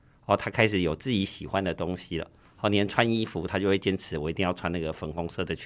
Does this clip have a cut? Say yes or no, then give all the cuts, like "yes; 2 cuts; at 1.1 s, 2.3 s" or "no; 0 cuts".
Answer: no; 0 cuts